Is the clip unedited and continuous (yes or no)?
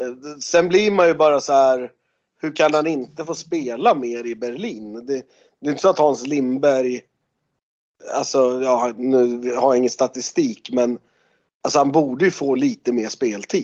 yes